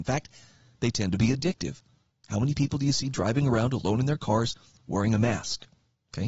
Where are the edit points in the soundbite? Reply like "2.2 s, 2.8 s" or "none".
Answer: none

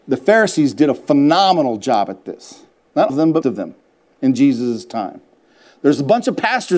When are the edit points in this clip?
3.1 s, 3.4 s

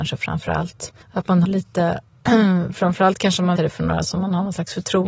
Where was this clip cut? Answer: 1.0 s, 1.4 s, 3.6 s

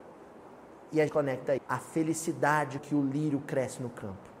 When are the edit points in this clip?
1.1 s, 1.6 s, 2.8 s

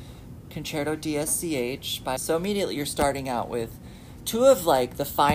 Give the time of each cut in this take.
2.2 s

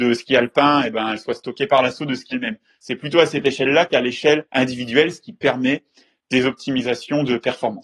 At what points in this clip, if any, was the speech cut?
2.3 s, 4.5 s

